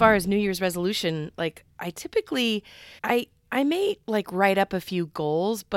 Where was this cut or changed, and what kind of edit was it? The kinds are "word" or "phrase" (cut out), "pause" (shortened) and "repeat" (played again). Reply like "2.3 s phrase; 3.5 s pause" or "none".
3.0 s pause; 4.0 s pause